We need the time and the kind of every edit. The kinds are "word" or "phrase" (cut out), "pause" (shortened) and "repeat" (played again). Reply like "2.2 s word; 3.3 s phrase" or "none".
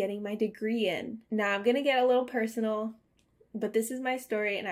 1.2 s pause